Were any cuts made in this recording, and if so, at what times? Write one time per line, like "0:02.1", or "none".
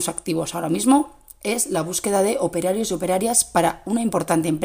none